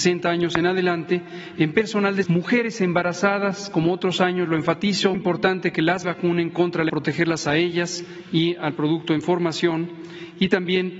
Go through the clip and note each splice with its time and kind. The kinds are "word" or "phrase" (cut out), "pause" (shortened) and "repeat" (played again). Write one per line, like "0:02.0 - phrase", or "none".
0:02.2 - word
0:05.1 - word
0:06.0 - phrase
0:06.9 - phrase